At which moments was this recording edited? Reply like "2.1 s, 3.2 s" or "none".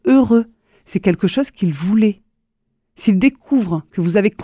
none